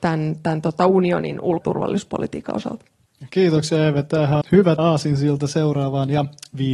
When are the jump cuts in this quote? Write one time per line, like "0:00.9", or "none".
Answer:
0:01.6
0:04.4
0:04.8